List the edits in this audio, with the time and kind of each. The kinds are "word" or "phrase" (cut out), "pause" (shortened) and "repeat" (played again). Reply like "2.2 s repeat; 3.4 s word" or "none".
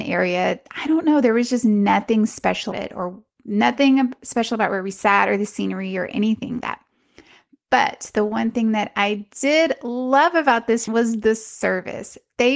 2.7 s word; 6.6 s word; 10.9 s word